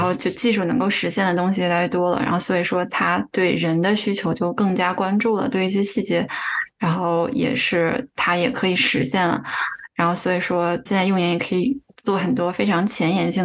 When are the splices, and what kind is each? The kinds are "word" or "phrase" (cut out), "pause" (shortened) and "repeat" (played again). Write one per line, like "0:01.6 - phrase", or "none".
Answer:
0:10.9 - word